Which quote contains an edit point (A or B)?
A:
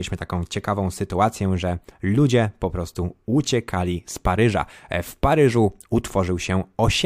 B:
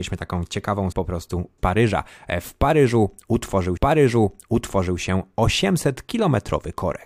B